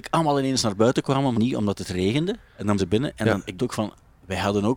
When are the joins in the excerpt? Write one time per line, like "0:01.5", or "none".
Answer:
0:01.3
0:02.5
0:02.8
0:03.6

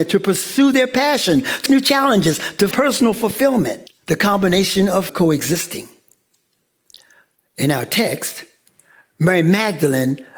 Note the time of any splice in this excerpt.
0:01.7
0:02.7
0:03.9
0:05.1

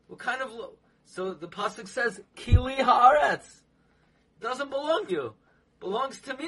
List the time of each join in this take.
0:05.1

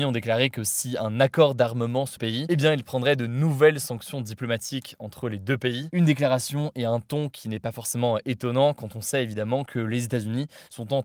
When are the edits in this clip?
0:02.2

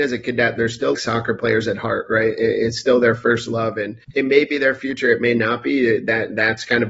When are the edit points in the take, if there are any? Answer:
0:00.9
0:04.0

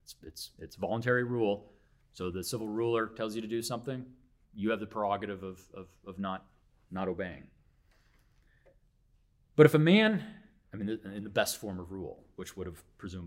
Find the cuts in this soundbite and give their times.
none

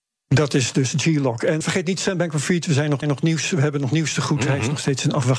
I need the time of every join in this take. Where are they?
0:01.6
0:03.0

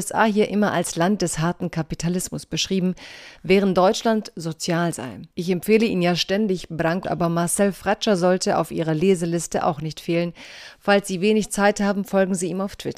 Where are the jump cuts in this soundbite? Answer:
0:05.3
0:07.0

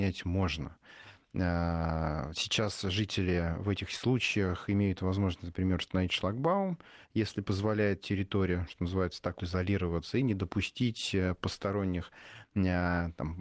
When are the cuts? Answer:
0:09.4

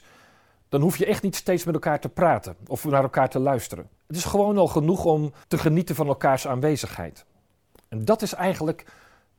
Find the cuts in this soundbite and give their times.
0:04.0
0:05.4

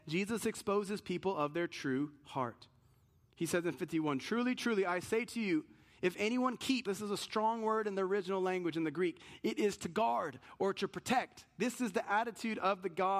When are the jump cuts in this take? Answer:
0:06.9

